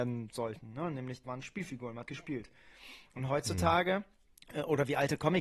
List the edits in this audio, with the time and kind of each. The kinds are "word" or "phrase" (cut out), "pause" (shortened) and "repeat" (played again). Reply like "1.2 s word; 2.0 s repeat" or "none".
1.2 s word; 2.1 s word; 4.2 s pause